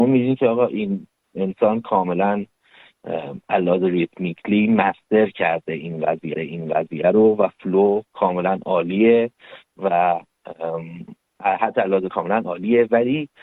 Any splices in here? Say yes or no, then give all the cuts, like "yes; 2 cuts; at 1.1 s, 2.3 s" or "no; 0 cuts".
yes; 3 cuts; at 3.4 s, 6.3 s, 12.1 s